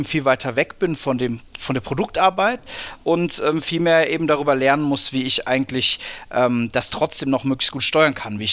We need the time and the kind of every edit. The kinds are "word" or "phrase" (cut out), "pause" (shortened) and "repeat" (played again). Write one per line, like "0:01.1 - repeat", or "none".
none